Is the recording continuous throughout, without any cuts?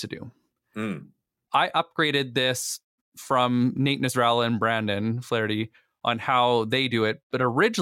yes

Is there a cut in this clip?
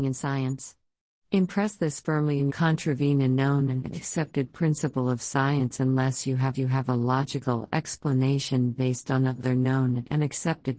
yes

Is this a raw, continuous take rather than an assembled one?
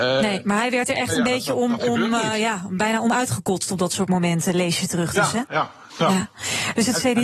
no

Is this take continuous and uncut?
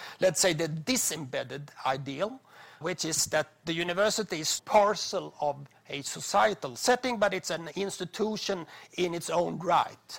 no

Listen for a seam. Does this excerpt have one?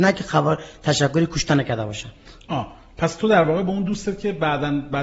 no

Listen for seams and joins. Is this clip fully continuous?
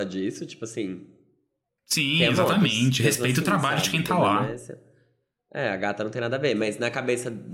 yes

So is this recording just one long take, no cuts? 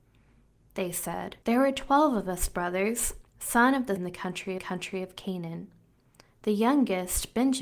no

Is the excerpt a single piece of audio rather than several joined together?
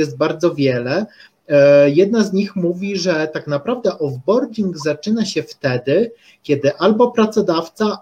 yes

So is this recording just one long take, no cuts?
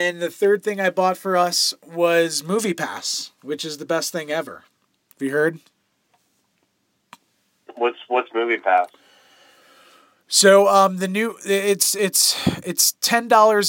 yes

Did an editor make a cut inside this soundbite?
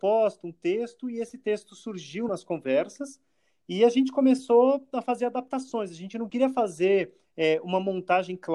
no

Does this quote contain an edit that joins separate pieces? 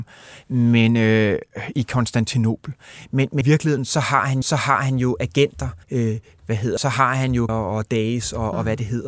yes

